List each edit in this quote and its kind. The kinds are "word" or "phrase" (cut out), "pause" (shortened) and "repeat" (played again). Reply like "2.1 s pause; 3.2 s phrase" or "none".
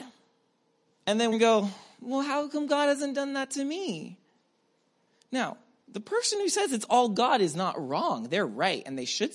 1.3 s phrase